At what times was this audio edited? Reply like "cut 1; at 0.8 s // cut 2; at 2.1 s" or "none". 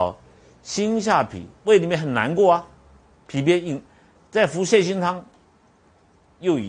none